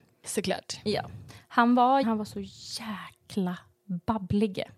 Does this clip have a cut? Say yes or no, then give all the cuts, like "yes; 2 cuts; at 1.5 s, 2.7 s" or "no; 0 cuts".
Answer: yes; 1 cut; at 2.0 s